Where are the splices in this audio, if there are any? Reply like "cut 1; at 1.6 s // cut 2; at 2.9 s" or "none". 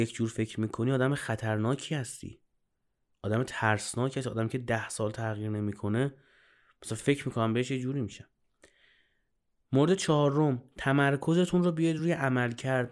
none